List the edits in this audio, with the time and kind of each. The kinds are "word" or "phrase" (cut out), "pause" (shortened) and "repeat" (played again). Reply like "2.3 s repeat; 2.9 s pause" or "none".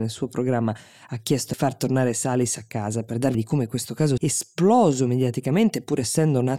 1.5 s phrase; 3.3 s word; 4.2 s word